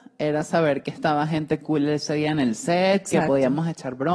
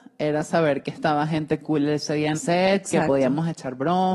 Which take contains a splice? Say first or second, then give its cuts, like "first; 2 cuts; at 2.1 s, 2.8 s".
second; 1 cut; at 2.3 s